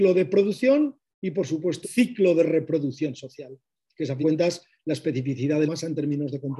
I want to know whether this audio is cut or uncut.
cut